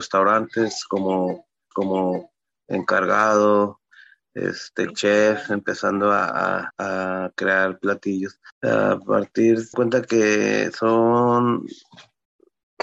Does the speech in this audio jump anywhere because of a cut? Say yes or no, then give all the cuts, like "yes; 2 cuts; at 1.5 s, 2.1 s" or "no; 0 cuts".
yes; 5 cuts; at 1.7 s, 4.9 s, 6.7 s, 8.5 s, 9.7 s